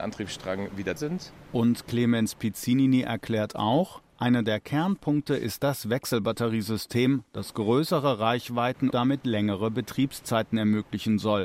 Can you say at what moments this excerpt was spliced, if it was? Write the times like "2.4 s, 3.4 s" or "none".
1.0 s, 8.9 s